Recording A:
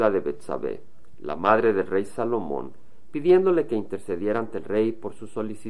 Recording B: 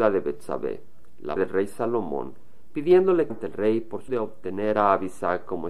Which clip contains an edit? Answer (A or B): B